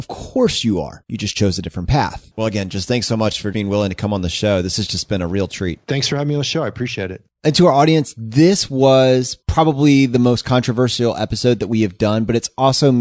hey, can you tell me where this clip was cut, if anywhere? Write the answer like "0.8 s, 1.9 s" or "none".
3.5 s, 5.8 s